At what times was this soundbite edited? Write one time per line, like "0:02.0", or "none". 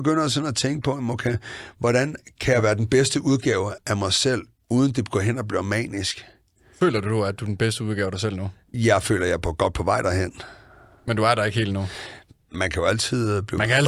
0:03.8